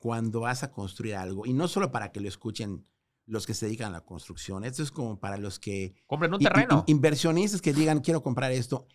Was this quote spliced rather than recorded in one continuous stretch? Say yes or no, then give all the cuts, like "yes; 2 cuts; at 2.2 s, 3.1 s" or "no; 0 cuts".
no; 0 cuts